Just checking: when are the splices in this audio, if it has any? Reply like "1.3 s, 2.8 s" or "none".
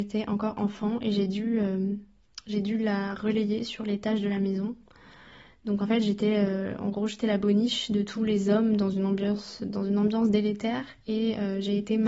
none